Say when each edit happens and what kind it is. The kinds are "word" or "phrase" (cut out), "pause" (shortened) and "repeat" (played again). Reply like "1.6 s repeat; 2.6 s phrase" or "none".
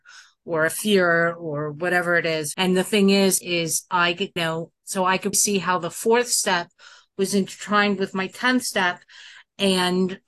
2.5 s word; 3.4 s word; 4.4 s word; 5.3 s word